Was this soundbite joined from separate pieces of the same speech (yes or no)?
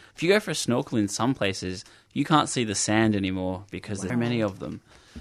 yes